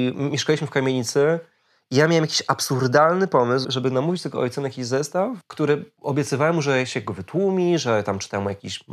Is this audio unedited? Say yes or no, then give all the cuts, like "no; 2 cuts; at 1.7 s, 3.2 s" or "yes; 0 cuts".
no; 1 cut; at 3.6 s